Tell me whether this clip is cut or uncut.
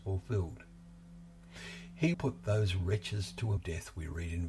cut